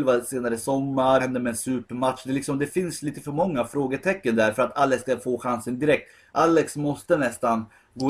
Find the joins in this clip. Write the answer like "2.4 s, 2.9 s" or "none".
1.2 s